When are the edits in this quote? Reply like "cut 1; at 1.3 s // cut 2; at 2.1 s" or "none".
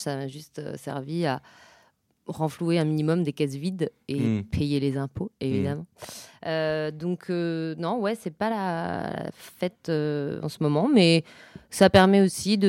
none